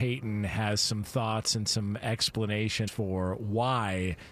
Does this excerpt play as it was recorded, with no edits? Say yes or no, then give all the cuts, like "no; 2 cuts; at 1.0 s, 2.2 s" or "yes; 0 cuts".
no; 1 cut; at 2.9 s